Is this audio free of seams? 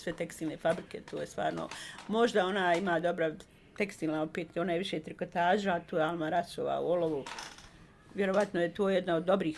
yes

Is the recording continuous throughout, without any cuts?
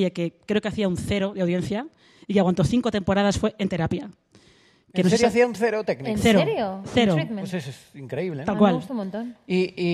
yes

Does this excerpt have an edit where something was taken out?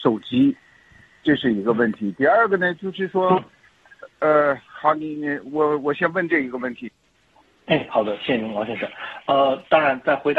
yes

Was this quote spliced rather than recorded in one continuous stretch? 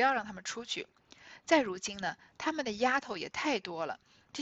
no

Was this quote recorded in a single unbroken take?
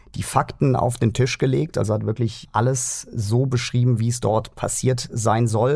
yes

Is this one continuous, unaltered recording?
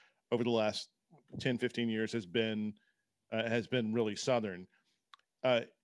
yes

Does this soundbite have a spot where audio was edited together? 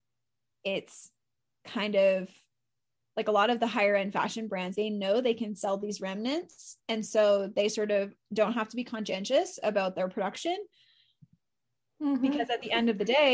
yes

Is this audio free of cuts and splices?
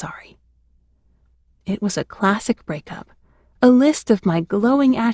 yes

